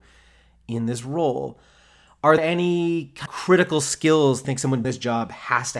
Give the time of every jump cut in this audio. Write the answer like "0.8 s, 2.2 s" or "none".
2.4 s, 3.3 s, 4.4 s, 4.8 s